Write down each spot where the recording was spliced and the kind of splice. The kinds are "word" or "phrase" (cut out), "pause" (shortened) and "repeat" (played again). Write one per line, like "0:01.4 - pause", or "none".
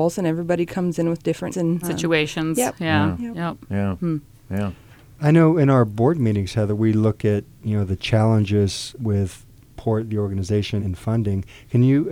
0:01.5 - word
0:01.8 - word
0:09.0 - word
0:10.8 - word